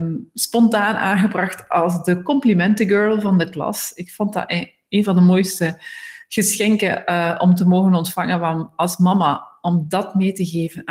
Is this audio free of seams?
yes; 0 cuts

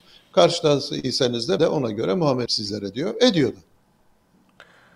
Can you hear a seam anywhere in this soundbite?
yes; 2 cuts; at 1.6 s, 2.5 s

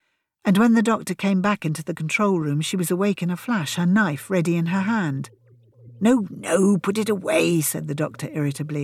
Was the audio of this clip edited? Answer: no; 0 cuts

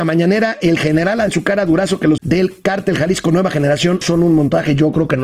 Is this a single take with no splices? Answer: no; 3 cuts; at 1.3 s, 2.2 s, 4.0 s

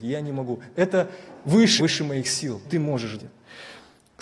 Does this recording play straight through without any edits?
no; 3 cuts; at 1.8 s, 2.6 s, 3.2 s

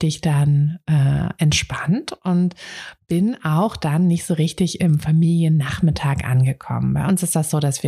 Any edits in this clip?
no; 0 cuts

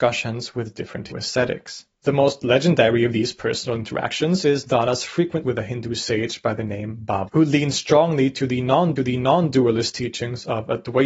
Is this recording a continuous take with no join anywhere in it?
no; 4 cuts; at 1.1 s, 5.4 s, 7.3 s, 9.0 s

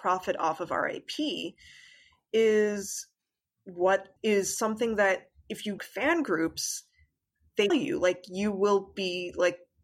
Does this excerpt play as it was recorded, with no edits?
no; 3 cuts; at 4.2 s, 5.8 s, 7.7 s

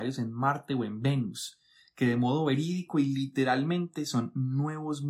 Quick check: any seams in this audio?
no; 0 cuts

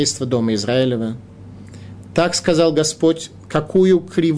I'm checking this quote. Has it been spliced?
no; 0 cuts

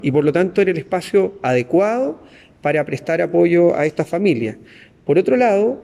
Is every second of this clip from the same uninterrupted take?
yes; 0 cuts

